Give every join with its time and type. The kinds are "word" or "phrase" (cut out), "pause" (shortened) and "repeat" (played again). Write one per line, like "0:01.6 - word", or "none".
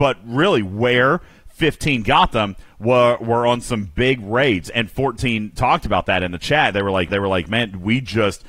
0:07.1 - repeat